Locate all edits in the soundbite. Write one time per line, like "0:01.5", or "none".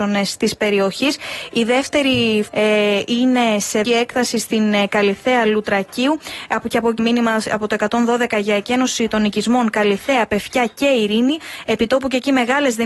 0:02.5
0:03.8
0:07.0